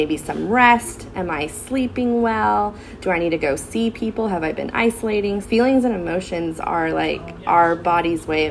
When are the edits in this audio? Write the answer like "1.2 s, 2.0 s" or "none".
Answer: 5.4 s